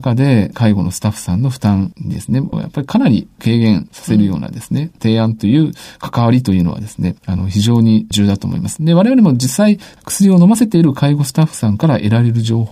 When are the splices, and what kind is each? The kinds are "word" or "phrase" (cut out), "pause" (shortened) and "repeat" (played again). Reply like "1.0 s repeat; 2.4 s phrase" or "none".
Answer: none